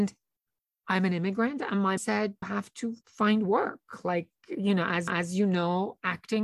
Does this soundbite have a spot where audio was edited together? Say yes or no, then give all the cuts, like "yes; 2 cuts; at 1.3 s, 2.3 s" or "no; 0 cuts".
yes; 4 cuts; at 2.0 s, 2.4 s, 3.0 s, 5.1 s